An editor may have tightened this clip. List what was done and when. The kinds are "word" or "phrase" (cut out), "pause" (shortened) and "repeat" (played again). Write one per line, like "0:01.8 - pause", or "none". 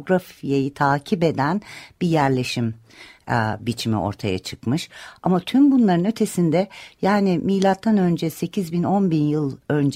none